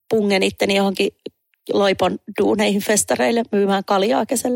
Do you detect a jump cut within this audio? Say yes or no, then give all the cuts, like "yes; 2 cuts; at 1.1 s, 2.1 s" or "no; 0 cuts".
no; 0 cuts